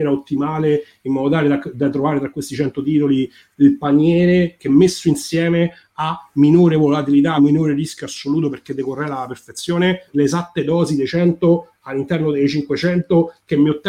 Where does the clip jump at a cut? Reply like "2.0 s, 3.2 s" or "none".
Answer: 7.4 s, 10.1 s

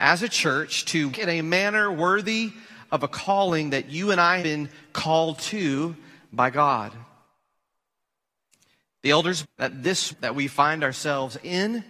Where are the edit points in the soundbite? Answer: 1.1 s, 4.4 s, 9.4 s, 10.1 s

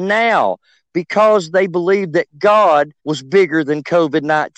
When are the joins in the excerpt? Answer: 3.0 s

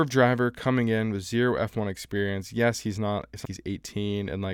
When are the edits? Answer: 3.4 s

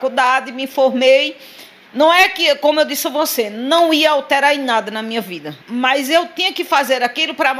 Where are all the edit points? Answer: 1.8 s, 5.6 s

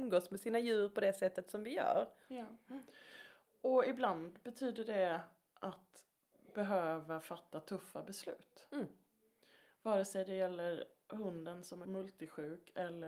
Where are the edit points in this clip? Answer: none

